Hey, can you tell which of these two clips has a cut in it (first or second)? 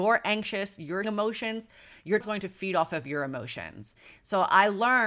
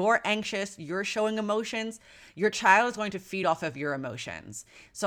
first